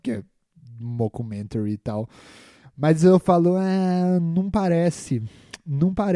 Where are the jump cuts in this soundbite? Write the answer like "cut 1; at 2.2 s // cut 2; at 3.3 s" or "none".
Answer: none